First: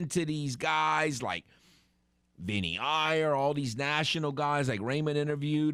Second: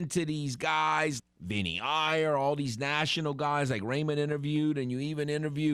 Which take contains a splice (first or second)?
second